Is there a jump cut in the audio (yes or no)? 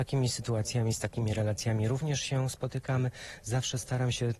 no